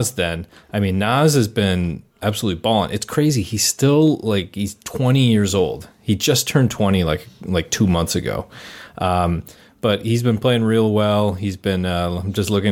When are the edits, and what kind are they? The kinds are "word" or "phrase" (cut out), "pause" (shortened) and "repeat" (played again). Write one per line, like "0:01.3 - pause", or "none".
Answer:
none